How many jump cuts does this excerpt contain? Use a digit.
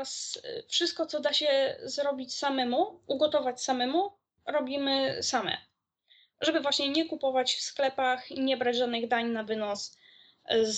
0